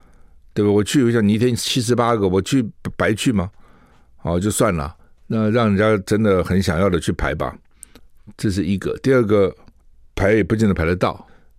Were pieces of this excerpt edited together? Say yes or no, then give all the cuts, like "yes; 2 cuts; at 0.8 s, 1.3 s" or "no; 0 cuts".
no; 0 cuts